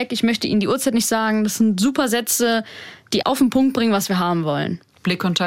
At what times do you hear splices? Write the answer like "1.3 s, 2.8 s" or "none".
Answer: 3.2 s